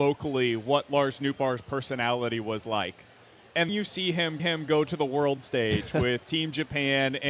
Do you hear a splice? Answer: yes; 2 cuts; at 3.7 s, 4.4 s

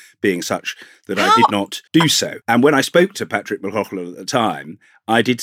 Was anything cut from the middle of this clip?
yes; 2 cuts; at 1.9 s, 2.4 s

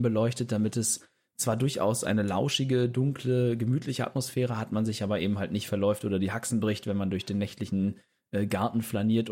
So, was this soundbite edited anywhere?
no; 0 cuts

